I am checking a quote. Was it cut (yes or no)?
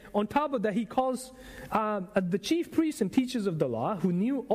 no